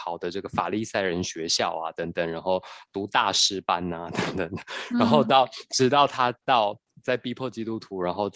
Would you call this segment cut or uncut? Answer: uncut